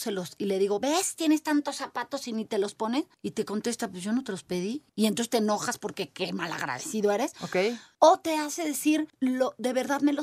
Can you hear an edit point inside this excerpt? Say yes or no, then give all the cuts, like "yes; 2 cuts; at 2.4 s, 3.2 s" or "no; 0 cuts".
no; 0 cuts